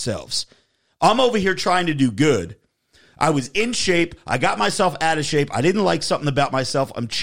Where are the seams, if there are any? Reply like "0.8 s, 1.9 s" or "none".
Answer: none